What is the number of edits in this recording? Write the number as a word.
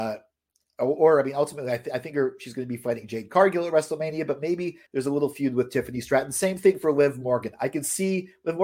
one